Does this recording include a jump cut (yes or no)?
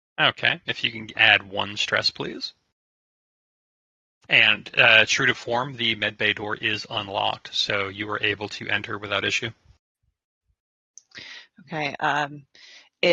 no